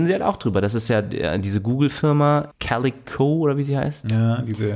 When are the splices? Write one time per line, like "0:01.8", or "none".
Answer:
0:02.5